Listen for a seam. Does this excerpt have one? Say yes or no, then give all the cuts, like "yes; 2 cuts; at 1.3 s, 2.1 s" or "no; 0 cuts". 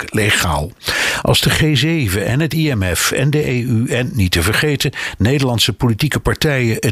no; 0 cuts